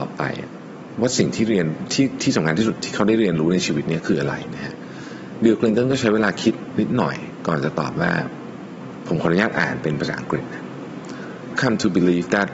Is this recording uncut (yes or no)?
no